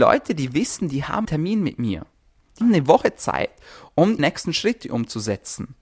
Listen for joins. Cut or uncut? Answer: cut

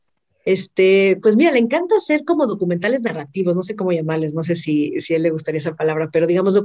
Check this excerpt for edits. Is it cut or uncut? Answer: uncut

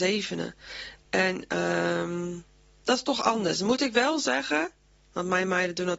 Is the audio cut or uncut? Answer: uncut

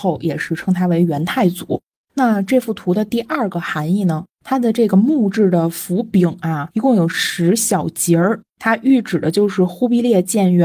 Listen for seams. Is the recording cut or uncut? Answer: uncut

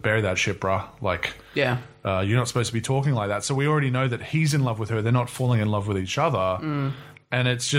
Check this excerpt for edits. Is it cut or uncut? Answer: uncut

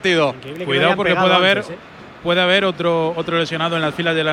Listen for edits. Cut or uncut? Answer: uncut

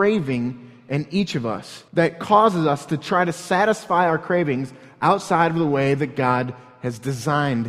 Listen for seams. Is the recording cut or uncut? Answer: cut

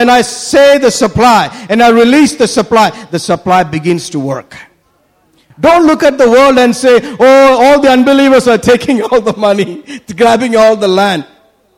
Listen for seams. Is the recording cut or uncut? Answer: uncut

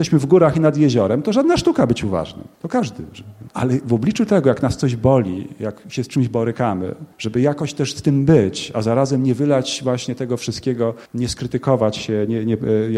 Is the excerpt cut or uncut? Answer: cut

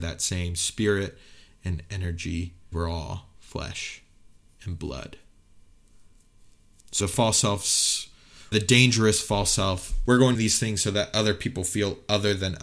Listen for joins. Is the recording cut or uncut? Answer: cut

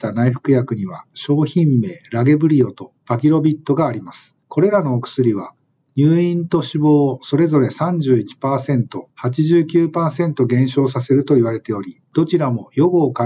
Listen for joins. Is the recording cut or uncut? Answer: cut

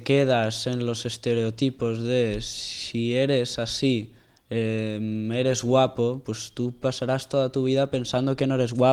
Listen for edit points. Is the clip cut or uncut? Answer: uncut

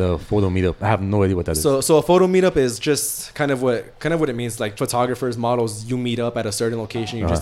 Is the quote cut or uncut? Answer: cut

